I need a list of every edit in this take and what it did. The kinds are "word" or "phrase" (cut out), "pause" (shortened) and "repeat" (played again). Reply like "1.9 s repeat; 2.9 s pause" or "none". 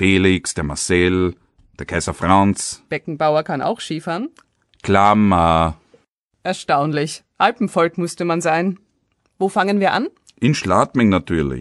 none